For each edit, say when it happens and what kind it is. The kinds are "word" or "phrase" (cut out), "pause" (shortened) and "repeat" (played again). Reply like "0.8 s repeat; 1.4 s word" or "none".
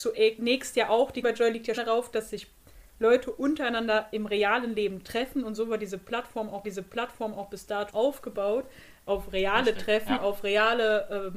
1.2 s word; 1.8 s word; 6.6 s repeat; 7.9 s word